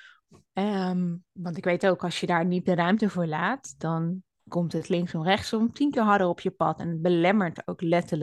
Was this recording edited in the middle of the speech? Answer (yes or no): no